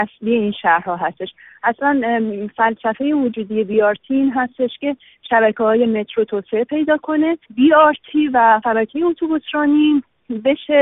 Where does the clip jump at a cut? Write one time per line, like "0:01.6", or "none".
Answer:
none